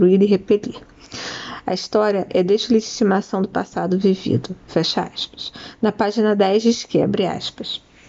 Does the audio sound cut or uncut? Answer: uncut